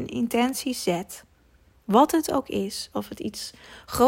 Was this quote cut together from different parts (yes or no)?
no